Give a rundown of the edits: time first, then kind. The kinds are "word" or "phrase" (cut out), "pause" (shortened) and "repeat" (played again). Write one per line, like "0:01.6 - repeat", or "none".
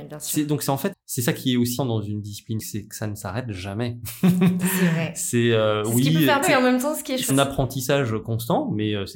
0:00.9 - word
0:01.8 - word
0:02.6 - word
0:06.4 - word
0:07.3 - word